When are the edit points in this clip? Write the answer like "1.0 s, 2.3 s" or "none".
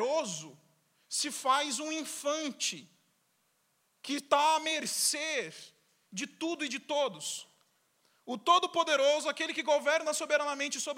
none